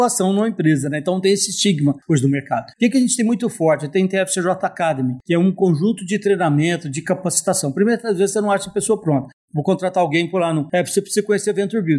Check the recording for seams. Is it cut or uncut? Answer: uncut